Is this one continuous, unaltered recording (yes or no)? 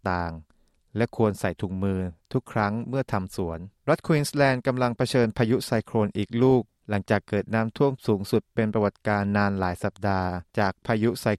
no